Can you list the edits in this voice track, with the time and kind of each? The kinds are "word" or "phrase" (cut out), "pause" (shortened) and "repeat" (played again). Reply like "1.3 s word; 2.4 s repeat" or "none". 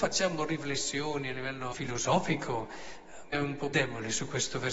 1.7 s word; 3.3 s word; 3.7 s word